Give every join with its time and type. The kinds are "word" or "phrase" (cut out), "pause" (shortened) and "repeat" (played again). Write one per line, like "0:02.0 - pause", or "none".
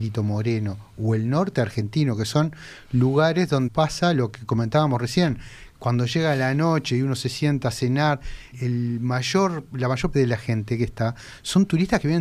0:03.7 - word
0:08.5 - word
0:10.1 - word